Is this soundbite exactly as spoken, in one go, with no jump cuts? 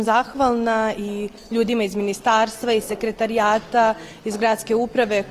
yes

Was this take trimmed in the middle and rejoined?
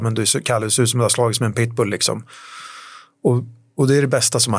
no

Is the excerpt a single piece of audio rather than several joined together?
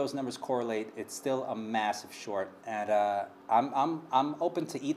no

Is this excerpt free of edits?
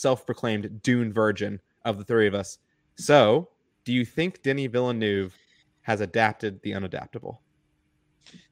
yes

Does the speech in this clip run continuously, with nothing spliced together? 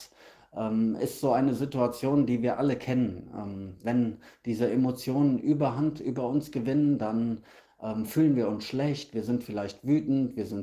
yes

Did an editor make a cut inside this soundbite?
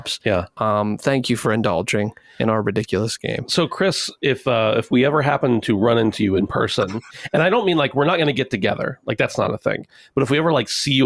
no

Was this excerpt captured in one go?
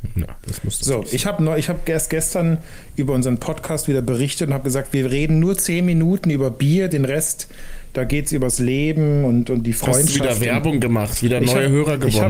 yes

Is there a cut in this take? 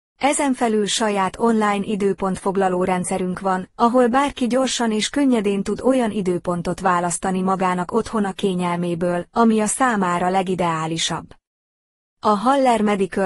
no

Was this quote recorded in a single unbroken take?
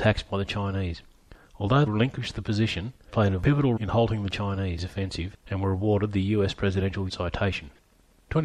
no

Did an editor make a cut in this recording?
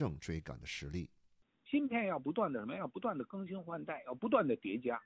no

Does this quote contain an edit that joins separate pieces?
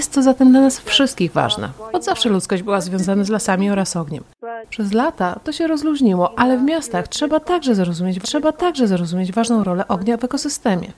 yes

